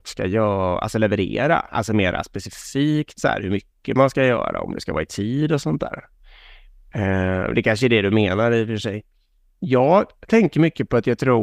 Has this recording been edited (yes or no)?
no